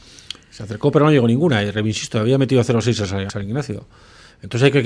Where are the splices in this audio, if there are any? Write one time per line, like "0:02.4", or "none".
0:03.3